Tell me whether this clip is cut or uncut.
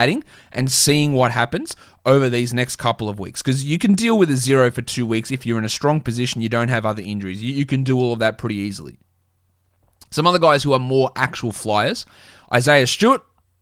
uncut